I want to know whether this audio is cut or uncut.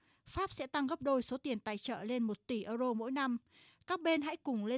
uncut